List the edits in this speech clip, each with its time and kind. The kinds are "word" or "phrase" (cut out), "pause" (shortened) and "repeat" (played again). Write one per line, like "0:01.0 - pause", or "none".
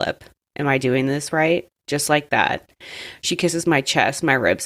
0:01.8 - pause